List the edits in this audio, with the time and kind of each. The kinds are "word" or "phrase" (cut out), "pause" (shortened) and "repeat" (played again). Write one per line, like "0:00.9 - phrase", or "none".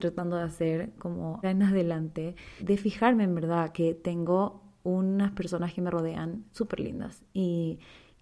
0:01.4 - word
0:02.6 - word